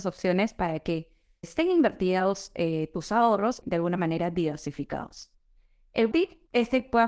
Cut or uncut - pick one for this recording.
cut